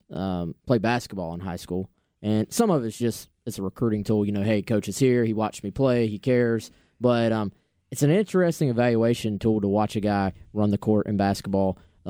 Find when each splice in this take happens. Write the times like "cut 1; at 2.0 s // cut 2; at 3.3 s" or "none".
none